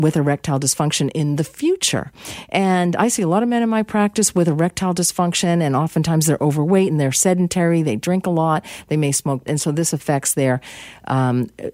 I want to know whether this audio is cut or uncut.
cut